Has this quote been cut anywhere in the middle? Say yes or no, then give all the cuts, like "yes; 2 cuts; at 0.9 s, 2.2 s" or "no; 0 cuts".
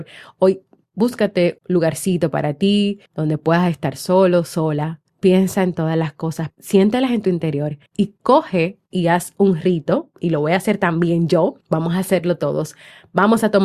yes; 7 cuts; at 1.6 s, 3.1 s, 5.1 s, 6.5 s, 7.9 s, 8.9 s, 11.6 s